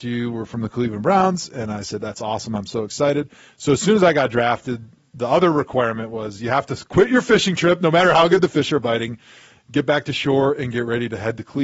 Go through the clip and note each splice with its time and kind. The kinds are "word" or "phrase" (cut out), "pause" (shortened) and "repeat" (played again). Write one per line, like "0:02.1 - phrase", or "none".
none